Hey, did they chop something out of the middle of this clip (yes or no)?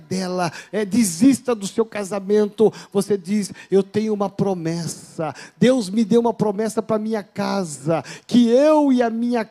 no